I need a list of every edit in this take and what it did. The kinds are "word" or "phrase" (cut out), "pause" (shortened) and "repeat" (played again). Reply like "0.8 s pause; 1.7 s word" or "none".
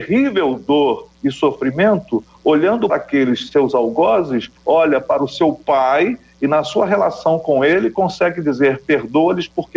2.9 s word; 4.6 s pause